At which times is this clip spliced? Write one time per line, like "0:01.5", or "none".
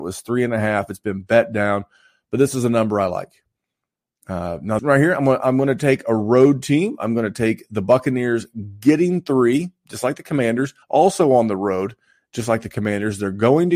0:04.8
0:10.8